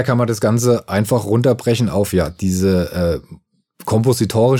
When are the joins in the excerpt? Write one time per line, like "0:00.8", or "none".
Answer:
none